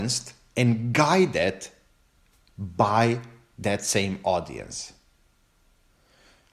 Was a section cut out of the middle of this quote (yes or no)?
no